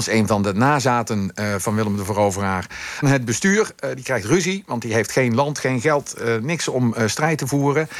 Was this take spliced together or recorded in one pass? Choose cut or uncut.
cut